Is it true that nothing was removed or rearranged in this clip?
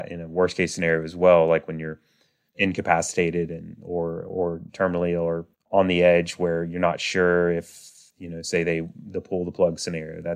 yes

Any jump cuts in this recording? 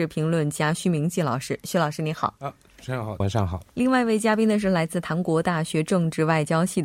yes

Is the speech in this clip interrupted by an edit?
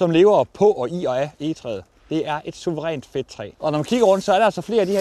yes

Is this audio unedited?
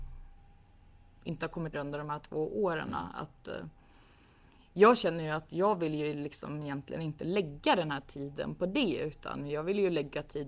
no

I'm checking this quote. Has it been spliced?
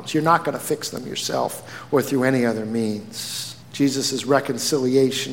yes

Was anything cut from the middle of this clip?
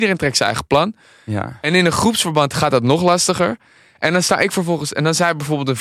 no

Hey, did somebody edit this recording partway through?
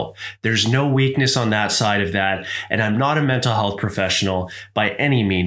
no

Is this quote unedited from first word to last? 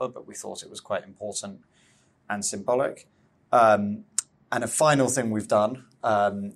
yes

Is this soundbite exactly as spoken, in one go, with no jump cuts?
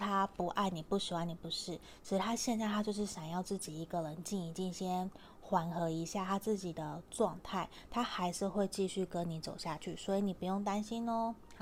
yes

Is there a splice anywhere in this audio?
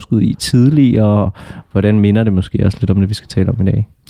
yes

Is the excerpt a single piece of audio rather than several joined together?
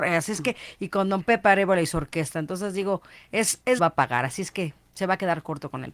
no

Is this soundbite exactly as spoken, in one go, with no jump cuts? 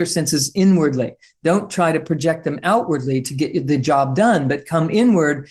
yes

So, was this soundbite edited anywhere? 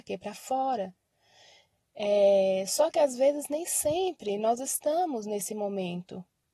no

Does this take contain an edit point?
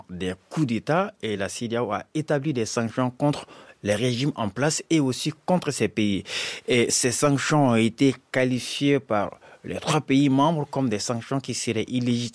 no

